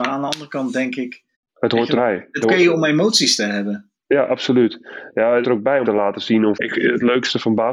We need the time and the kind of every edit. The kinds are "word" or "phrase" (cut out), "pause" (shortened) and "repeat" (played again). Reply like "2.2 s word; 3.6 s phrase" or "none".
1.3 s pause; 2.0 s word; 2.4 s phrase; 4.3 s word; 5.4 s phrase; 5.8 s word; 6.5 s word